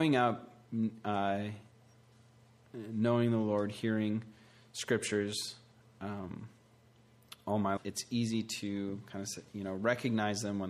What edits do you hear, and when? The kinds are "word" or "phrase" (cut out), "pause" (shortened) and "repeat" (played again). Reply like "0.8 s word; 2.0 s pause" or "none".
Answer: 7.8 s word